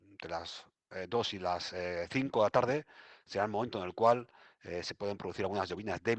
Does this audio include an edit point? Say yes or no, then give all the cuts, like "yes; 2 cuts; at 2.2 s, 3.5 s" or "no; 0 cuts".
no; 0 cuts